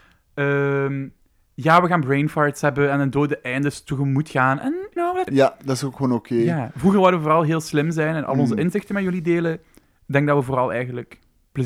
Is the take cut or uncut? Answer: cut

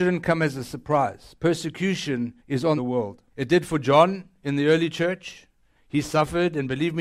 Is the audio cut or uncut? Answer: cut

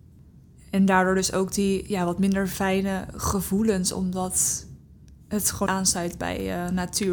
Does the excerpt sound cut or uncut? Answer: cut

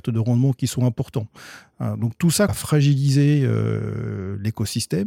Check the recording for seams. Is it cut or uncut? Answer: cut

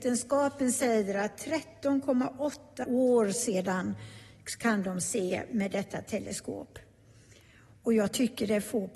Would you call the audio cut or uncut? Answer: cut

